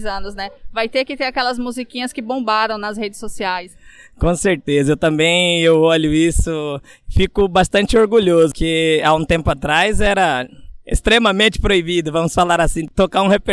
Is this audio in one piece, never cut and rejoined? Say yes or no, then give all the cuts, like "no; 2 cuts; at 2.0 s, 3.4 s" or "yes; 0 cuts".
yes; 0 cuts